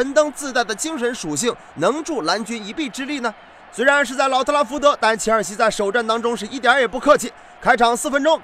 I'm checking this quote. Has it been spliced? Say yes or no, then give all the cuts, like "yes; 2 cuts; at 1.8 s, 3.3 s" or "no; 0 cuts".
no; 0 cuts